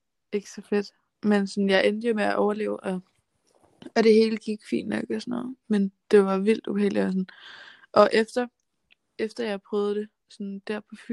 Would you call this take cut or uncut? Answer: uncut